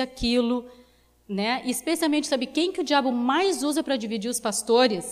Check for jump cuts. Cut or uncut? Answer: uncut